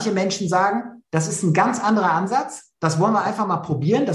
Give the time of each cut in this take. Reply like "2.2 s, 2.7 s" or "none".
none

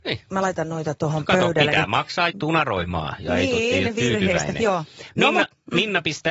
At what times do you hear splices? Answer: 2.3 s

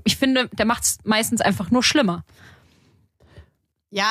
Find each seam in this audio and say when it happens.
none

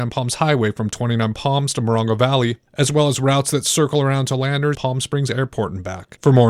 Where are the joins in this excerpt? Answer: 4.7 s

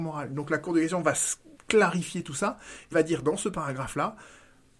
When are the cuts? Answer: 2.9 s

